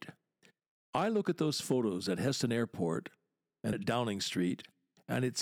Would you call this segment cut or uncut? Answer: cut